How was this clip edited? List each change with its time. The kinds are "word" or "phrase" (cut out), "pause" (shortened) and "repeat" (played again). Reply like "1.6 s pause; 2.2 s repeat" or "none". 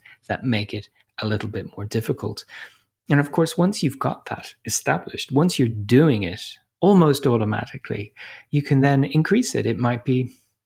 none